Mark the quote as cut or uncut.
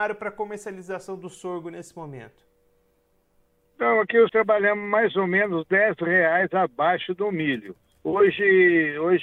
cut